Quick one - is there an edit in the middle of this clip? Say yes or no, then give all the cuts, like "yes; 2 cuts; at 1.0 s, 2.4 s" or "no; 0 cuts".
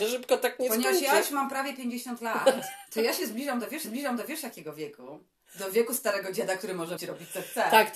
yes; 3 cuts; at 2.9 s, 3.8 s, 7.0 s